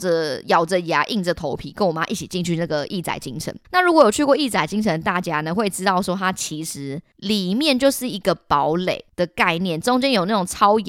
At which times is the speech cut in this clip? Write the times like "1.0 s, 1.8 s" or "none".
3.6 s